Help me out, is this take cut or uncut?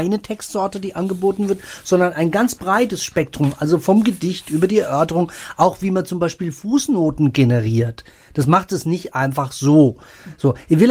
uncut